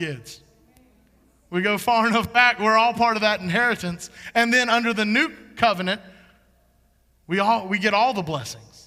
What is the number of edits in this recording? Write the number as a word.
zero